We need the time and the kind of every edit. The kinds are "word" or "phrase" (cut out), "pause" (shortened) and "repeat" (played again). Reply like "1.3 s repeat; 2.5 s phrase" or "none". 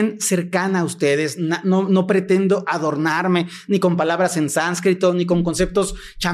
none